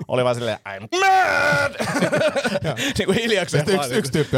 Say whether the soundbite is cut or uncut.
cut